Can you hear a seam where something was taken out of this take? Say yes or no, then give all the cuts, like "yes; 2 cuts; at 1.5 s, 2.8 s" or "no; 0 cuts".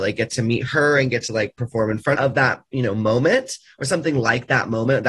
yes; 1 cut; at 2.1 s